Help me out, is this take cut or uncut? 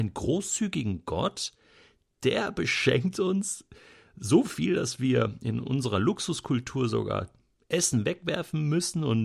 uncut